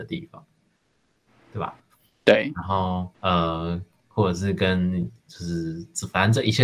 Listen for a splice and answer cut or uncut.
cut